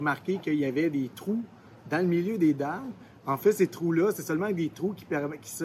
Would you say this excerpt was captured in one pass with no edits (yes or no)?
yes